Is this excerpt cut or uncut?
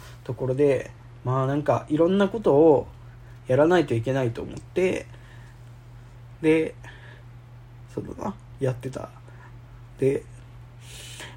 uncut